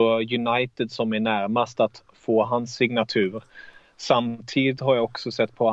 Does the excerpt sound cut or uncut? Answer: uncut